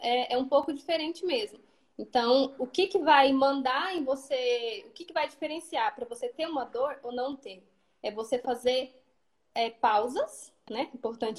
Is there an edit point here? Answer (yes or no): no